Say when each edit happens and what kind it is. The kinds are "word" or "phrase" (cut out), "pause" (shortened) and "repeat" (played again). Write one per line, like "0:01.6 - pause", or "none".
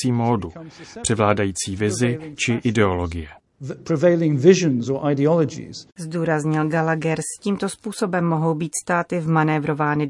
0:05.9 - pause
0:07.4 - phrase